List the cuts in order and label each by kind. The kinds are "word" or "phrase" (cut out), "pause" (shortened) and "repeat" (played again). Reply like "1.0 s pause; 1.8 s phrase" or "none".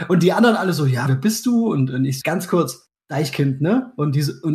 1.1 s word; 2.2 s word; 3.0 s word